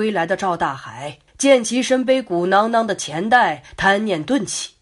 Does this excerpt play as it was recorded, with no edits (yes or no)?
no